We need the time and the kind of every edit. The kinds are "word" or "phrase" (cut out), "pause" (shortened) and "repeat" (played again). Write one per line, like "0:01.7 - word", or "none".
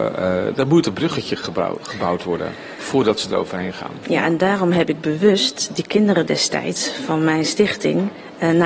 none